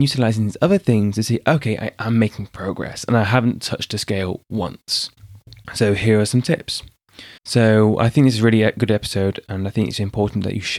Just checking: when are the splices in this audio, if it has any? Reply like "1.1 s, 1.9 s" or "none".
5.6 s, 7.4 s